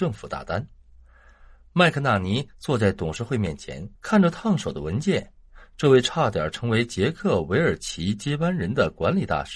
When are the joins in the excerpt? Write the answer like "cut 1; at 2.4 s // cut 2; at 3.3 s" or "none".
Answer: cut 1; at 4.0 s